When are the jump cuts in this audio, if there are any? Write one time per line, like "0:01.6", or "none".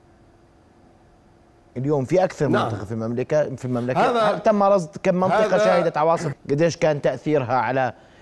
0:06.3